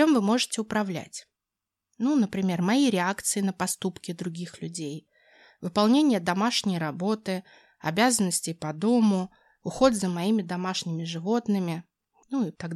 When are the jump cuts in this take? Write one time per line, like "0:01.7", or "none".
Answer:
none

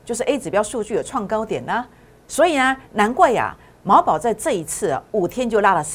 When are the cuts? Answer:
none

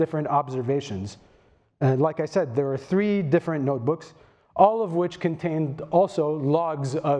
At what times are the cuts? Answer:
none

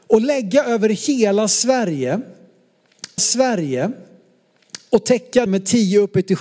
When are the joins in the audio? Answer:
0:03.2
0:05.5

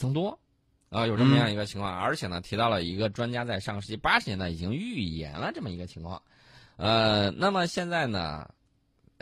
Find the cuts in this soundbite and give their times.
none

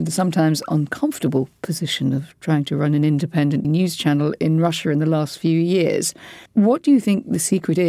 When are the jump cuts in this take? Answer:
0:03.6
0:06.5

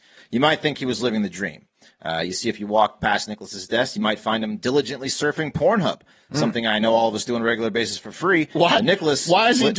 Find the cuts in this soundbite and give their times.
none

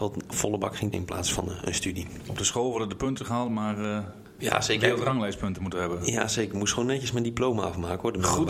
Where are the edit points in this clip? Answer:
0:00.9

